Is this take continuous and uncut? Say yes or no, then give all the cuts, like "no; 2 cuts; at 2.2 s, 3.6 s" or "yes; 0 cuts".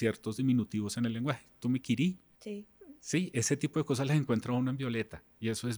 yes; 0 cuts